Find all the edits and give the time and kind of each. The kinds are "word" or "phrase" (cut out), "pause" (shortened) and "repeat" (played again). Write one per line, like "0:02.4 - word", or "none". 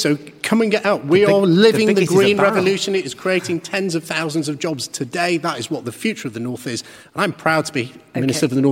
none